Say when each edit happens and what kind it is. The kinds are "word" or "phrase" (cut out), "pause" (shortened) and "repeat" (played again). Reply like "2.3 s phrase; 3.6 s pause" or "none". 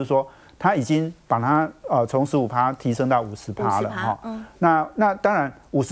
none